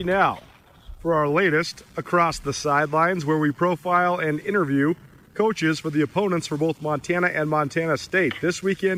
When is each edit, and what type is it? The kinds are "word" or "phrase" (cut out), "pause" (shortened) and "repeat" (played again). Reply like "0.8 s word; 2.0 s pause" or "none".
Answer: none